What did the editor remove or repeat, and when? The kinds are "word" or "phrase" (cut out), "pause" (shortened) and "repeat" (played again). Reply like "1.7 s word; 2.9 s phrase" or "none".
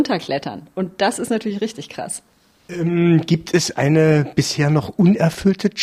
none